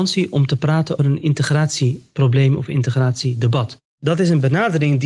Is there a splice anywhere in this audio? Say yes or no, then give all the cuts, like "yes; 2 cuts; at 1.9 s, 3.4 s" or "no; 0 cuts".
yes; 2 cuts; at 1.0 s, 3.9 s